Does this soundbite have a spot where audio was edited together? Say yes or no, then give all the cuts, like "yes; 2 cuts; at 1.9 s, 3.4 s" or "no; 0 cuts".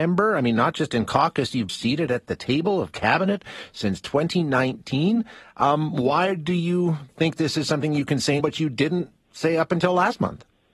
yes; 2 cuts; at 1.7 s, 8.4 s